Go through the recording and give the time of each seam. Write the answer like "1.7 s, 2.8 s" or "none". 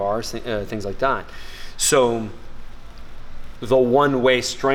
3.6 s

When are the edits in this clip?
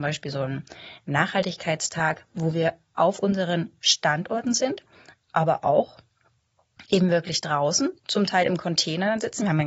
8.0 s

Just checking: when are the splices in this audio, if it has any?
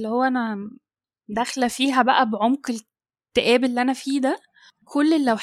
none

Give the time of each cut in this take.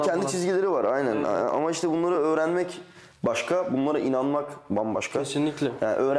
none

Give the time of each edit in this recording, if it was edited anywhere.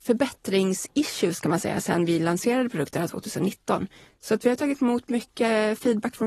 none

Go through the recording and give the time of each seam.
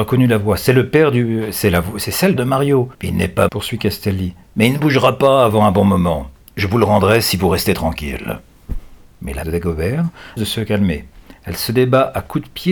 2.4 s, 2.9 s, 3.5 s, 4.4 s, 9.4 s, 10.4 s

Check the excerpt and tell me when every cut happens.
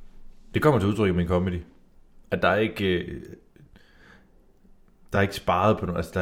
none

